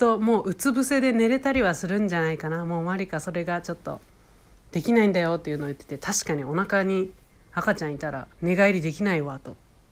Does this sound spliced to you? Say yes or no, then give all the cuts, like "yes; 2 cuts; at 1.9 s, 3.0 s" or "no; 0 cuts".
yes; 1 cut; at 8.3 s